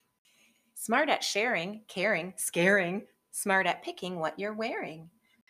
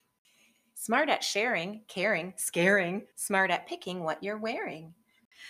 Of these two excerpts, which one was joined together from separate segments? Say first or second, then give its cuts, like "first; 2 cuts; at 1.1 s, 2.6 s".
second; 1 cut; at 3.1 s